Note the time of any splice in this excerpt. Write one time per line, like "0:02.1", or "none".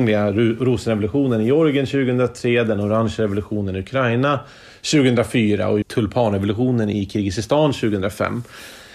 0:05.8